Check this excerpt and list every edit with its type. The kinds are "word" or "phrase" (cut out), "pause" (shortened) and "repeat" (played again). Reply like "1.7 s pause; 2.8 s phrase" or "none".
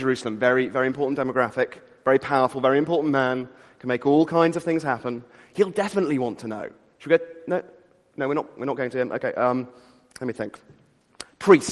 none